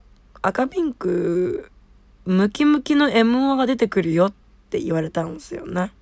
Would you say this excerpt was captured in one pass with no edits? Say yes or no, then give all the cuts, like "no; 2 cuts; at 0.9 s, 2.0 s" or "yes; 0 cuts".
yes; 0 cuts